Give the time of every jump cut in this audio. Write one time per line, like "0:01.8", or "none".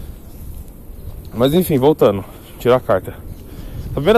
none